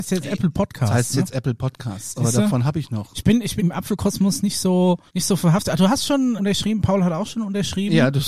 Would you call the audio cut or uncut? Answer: cut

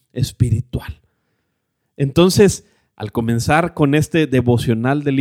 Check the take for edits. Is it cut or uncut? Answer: uncut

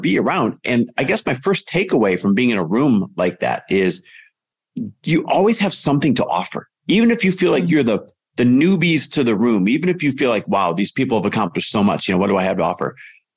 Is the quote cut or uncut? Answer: uncut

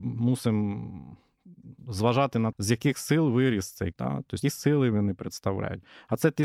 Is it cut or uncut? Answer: cut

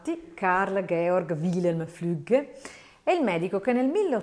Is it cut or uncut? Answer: uncut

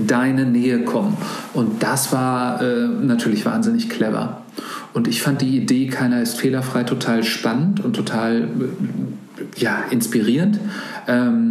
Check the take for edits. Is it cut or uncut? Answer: uncut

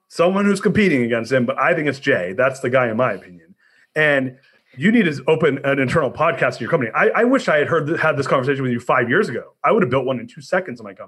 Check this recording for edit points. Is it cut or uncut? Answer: uncut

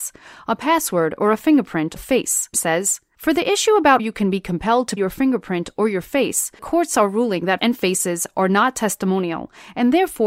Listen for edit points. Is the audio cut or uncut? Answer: cut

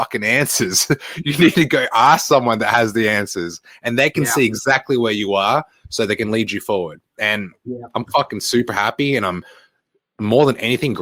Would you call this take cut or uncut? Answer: uncut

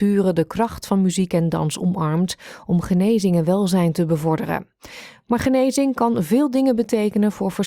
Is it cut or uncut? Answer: uncut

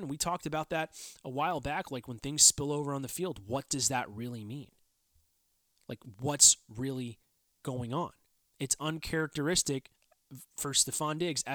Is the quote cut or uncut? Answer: cut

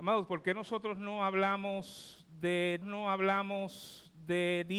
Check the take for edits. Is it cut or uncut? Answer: cut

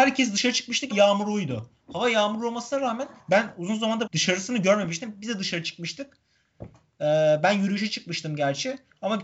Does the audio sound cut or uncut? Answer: cut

